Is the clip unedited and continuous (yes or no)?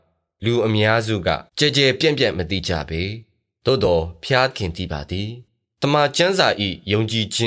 no